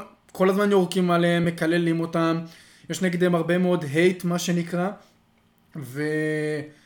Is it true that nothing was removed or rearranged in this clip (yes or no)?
yes